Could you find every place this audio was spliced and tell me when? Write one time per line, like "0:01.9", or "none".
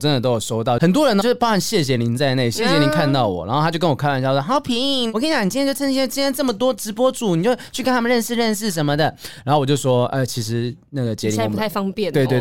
0:01.2